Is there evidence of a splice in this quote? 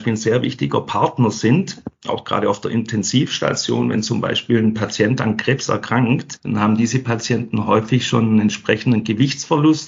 no; 0 cuts

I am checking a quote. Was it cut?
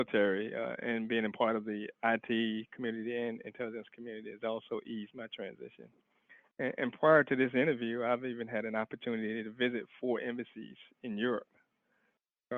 no; 0 cuts

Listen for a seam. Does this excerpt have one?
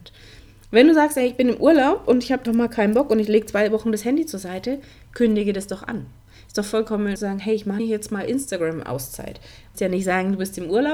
yes; 4 cuts; at 2.5 s, 7.2 s, 7.8 s, 9.7 s

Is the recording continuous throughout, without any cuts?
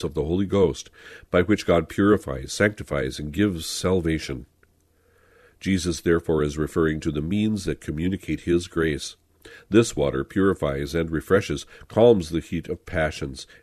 yes; 0 cuts

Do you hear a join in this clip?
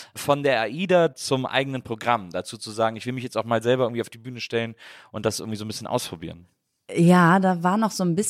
no; 0 cuts

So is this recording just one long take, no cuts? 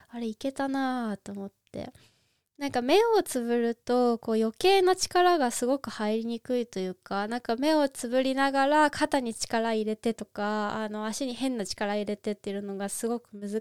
yes; 0 cuts

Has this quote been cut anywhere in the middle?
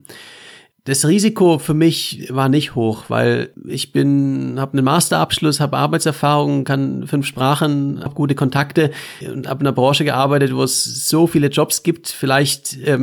yes; 2 cuts; at 8.1 s, 9.2 s

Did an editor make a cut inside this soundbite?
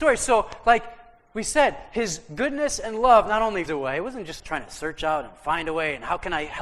yes; 2 cuts; at 3.7 s, 4.4 s

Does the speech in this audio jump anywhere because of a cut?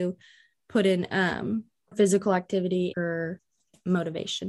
yes; 2 cuts; at 1.9 s, 2.9 s

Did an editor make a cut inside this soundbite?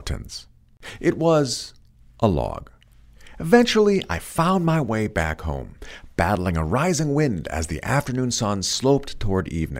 no; 0 cuts

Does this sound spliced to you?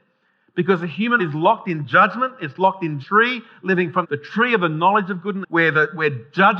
yes; 4 cuts; at 1.2 s, 3.0 s, 4.0 s, 5.4 s

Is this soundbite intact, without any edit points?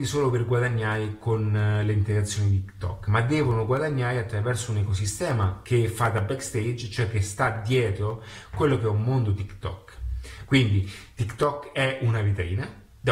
no; 1 cut; at 5.6 s

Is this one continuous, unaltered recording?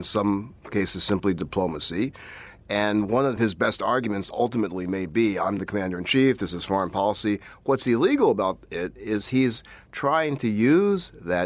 yes; 0 cuts

